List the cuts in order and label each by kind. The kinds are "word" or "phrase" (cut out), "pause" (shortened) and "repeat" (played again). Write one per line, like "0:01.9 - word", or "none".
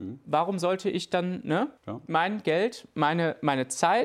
0:01.8 - pause